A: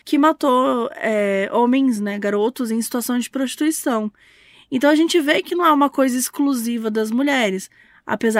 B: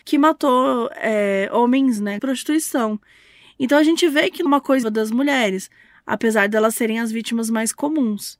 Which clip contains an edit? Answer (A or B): B